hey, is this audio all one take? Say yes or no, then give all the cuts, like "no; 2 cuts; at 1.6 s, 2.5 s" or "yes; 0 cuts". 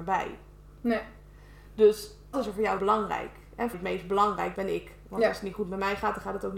no; 4 cuts; at 2.3 s, 2.8 s, 3.7 s, 4.6 s